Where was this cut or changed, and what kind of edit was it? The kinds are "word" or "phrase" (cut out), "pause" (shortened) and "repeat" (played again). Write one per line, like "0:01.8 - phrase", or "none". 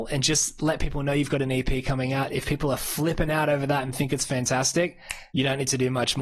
0:05.3 - pause

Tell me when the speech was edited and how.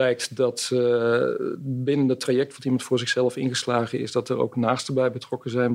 none

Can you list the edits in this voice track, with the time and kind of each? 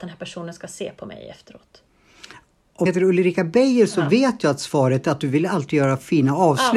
0:02.9 - word

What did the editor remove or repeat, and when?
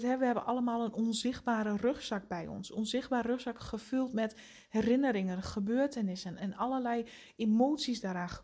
none

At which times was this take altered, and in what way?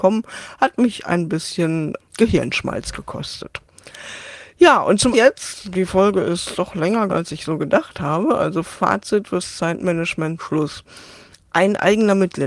0:02.0 - word
0:05.1 - word
0:05.6 - word
0:07.1 - word
0:09.2 - phrase
0:10.4 - word

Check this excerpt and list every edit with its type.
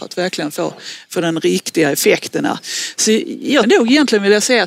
0:03.6 - word

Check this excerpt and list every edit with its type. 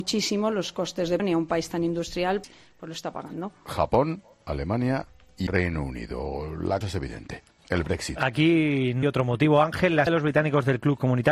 0:01.2 - word
0:02.4 - word
0:05.5 - word
0:06.8 - word
0:09.0 - word
0:10.1 - word

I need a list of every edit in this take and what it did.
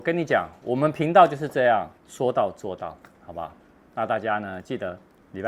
0:02.0 - pause

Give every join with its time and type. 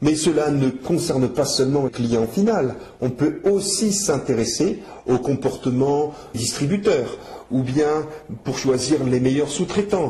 0:01.9 - word
0:06.3 - word

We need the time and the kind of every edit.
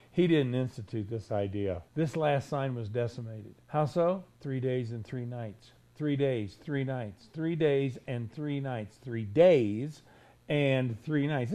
0:01.9 - pause
0:03.6 - pause
0:04.3 - pause

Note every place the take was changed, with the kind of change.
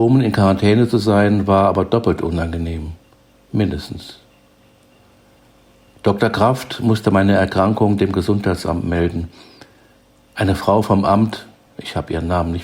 none

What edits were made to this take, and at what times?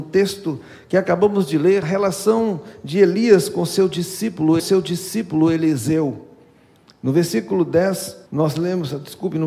0:01.8 - word
0:04.6 - repeat
0:08.3 - pause

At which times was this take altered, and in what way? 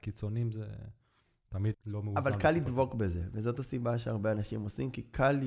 0:01.7 - word

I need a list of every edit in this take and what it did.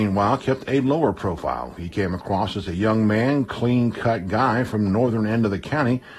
none

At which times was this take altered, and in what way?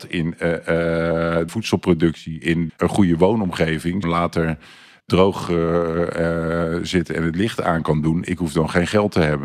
0:01.5 - phrase
0:02.7 - phrase
0:04.0 - phrase

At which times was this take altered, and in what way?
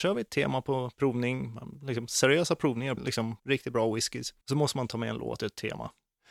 0:03.0 - word
0:03.4 - pause
0:04.4 - pause
0:05.4 - word

